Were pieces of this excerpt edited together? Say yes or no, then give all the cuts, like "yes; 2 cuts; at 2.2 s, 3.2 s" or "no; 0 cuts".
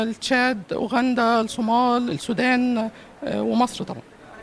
no; 0 cuts